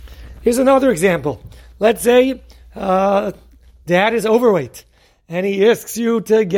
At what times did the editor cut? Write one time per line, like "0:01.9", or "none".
none